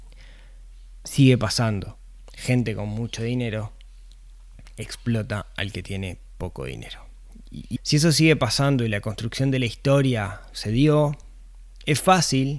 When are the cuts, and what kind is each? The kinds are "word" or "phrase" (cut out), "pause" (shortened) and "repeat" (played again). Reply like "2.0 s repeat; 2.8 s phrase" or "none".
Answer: 7.8 s word